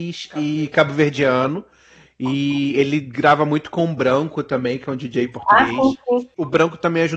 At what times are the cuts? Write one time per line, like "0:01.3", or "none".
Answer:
none